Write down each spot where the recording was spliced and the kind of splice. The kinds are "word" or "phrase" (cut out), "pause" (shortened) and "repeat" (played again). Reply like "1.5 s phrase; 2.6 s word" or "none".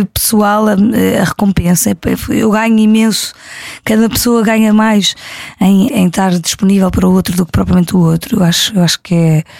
5.9 s word